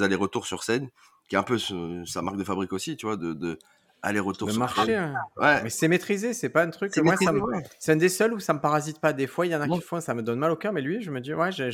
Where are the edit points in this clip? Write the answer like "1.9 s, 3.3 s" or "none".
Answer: none